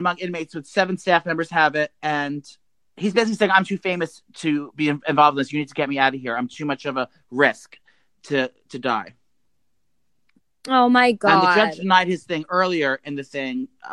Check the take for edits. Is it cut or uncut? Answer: uncut